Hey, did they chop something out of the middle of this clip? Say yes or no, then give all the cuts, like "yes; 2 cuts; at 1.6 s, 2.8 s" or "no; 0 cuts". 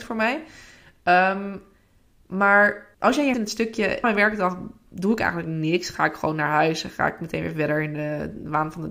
yes; 3 cuts; at 2.9 s, 3.3 s, 4.0 s